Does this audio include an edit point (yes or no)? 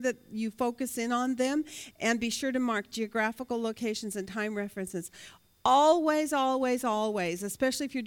no